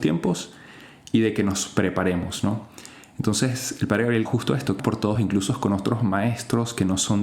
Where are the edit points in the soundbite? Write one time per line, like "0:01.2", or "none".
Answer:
0:04.2
0:04.8
0:05.1